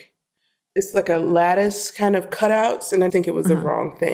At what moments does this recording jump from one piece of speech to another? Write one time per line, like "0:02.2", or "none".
0:03.1